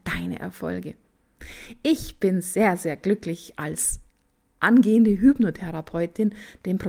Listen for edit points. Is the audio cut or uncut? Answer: uncut